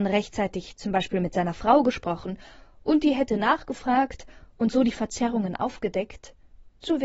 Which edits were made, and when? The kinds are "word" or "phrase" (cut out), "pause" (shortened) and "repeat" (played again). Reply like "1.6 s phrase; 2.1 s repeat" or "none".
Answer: none